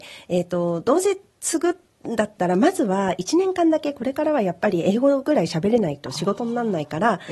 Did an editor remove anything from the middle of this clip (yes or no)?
no